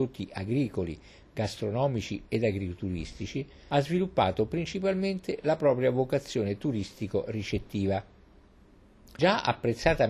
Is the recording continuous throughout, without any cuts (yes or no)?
yes